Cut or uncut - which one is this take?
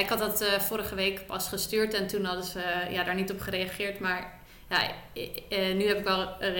uncut